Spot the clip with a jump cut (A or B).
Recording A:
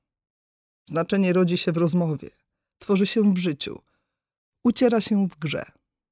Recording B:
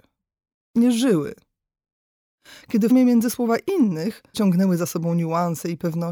B